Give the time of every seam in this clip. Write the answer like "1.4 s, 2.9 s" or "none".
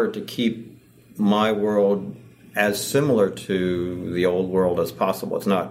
none